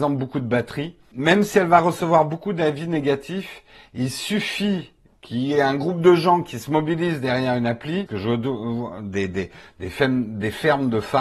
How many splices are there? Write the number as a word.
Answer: two